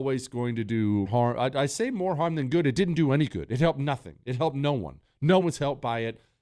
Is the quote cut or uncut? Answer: cut